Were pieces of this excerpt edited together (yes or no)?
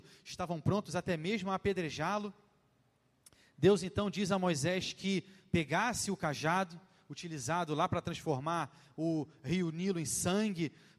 no